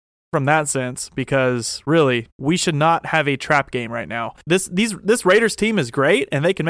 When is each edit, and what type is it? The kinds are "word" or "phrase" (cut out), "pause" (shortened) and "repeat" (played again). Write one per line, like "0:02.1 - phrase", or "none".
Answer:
0:02.3 - pause
0:04.4 - pause